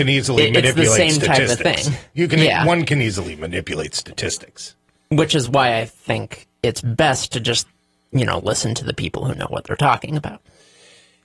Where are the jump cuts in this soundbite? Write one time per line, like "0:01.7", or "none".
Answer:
none